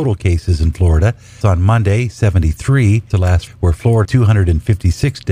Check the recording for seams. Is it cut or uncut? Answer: cut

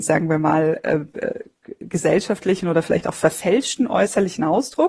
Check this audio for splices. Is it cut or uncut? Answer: uncut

